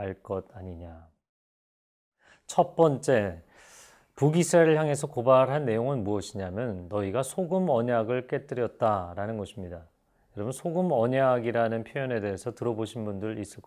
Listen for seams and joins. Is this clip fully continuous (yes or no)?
yes